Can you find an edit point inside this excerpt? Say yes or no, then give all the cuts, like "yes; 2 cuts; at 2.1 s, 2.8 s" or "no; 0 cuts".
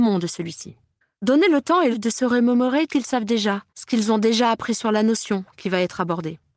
yes; 3 cuts; at 1.9 s, 2.9 s, 3.7 s